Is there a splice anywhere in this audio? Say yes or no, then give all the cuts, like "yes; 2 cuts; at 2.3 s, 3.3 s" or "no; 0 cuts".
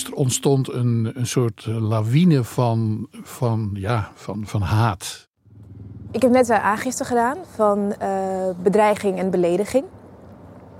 no; 0 cuts